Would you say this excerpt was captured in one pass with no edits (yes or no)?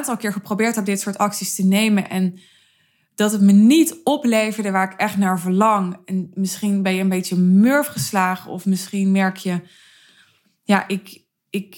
yes